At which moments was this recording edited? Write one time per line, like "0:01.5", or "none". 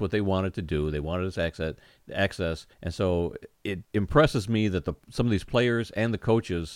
0:02.7
0:03.5
0:03.8